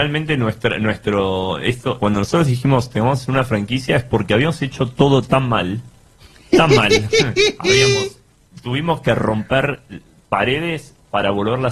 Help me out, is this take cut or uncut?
cut